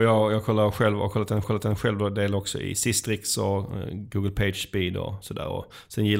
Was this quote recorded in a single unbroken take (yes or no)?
no